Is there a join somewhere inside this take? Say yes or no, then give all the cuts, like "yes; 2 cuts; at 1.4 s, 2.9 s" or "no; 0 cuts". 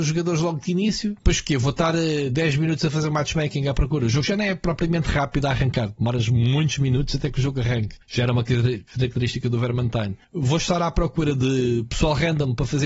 yes; 3 cuts; at 1.2 s, 8.0 s, 10.2 s